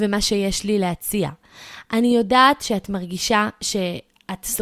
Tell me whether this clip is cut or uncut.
uncut